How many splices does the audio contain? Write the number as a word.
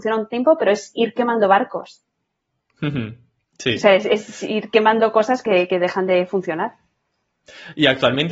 zero